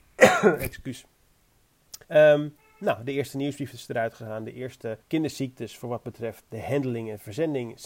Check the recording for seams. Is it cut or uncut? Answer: cut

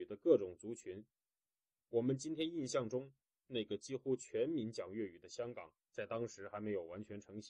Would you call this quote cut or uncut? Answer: cut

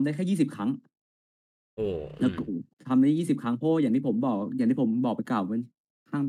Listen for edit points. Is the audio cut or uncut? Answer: cut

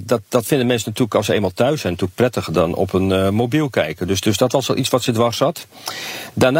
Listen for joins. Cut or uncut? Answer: uncut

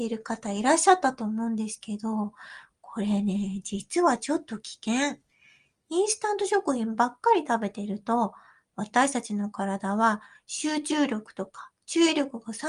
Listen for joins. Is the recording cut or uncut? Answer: uncut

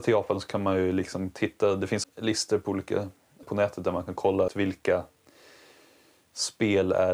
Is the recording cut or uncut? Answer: cut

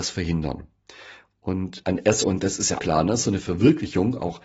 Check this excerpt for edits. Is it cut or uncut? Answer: cut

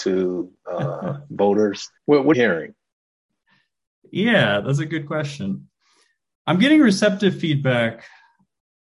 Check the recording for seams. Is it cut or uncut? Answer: cut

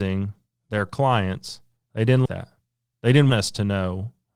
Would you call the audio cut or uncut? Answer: cut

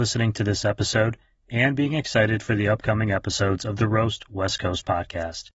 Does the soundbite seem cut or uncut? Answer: uncut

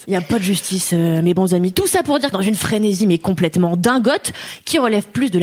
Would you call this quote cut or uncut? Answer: cut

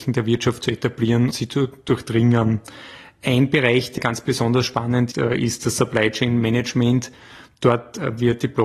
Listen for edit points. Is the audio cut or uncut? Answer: cut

